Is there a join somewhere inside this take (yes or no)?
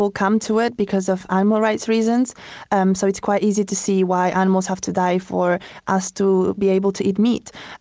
no